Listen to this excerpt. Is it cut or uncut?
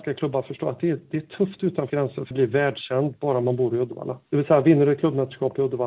cut